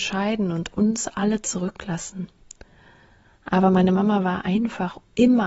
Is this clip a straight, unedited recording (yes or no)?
yes